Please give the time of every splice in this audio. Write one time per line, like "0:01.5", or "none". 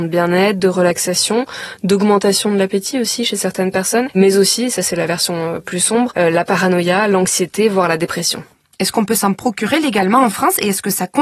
none